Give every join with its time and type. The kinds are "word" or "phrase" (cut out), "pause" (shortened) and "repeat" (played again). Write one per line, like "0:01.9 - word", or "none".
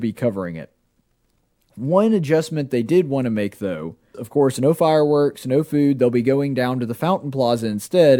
0:04.1 - word